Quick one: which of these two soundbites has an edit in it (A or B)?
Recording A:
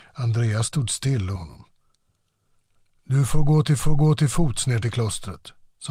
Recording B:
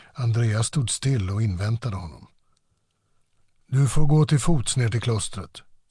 A